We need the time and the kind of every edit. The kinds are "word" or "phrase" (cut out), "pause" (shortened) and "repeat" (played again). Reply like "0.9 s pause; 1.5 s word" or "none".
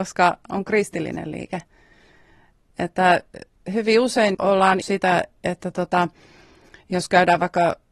4.3 s word; 4.8 s word

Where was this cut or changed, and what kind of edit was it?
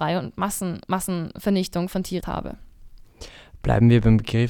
1.9 s word; 2.2 s word

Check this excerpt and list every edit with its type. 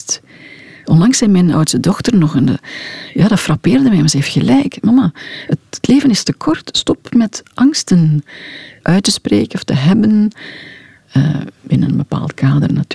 8.8 s word

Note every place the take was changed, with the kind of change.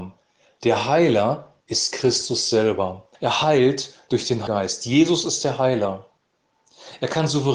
1.6 s pause; 3.1 s pause; 4.5 s word

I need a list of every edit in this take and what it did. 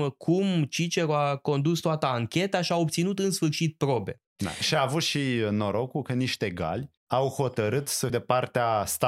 7.0 s pause; 8.1 s word

